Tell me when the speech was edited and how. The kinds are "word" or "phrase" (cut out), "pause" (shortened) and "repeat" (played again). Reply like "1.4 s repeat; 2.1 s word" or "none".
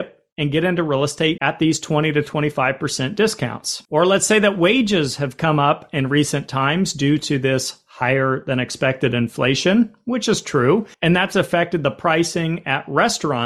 1.4 s word; 3.8 s pause; 10.9 s pause